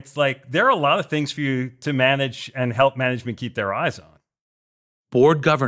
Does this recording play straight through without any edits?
yes; 0 cuts

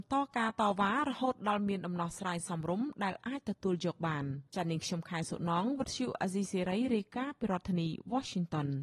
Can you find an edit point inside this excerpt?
yes; 1 cut; at 4.5 s

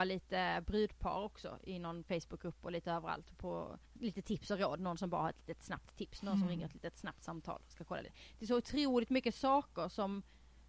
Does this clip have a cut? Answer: yes; 1 cut; at 3.8 s

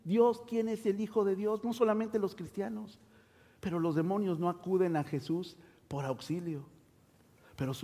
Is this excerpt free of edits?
yes; 0 cuts

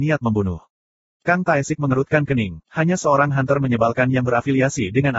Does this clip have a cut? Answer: yes; 1 cut; at 2.6 s

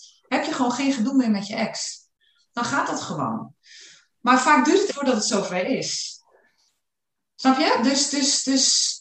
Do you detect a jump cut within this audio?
yes; 1 cut; at 4.9 s

